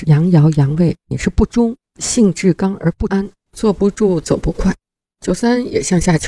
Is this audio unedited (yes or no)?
yes